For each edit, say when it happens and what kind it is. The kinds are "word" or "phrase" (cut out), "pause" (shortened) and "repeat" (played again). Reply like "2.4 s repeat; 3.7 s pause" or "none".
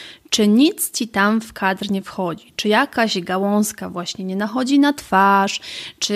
none